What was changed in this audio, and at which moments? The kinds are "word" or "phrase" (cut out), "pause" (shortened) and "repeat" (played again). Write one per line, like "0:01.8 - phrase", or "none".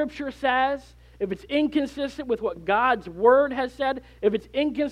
none

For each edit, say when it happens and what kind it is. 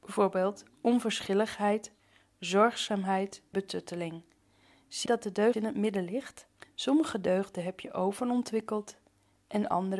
0:03.5 - word
0:05.1 - word
0:05.5 - word
0:06.6 - pause

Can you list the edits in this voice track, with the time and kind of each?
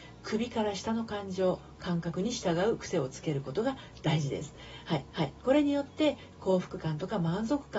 0:05.1 - repeat

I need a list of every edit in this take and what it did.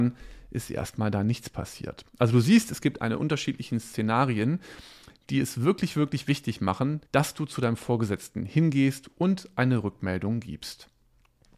0:03.2 - phrase
0:07.1 - pause

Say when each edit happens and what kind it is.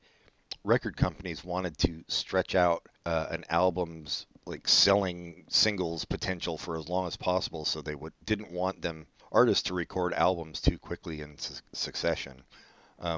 0:02.9 - pause
0:04.3 - pause
0:09.2 - pause

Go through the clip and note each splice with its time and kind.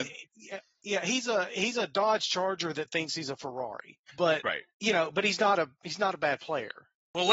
0:04.1 - pause
0:04.7 - pause

